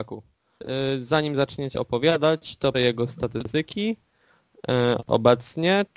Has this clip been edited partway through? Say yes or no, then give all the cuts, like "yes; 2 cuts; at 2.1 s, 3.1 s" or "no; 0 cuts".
yes; 2 cuts; at 1.7 s, 2.7 s